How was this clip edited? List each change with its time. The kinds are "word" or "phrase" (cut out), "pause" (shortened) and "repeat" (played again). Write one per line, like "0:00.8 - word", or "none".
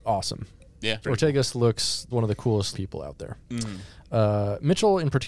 0:01.0 - word
0:02.1 - word
0:02.7 - word